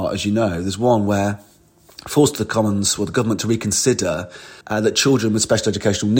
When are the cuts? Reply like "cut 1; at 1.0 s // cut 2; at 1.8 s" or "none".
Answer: cut 1; at 4.6 s